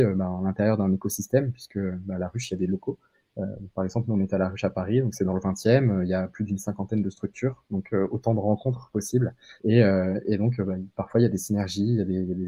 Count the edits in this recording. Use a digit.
1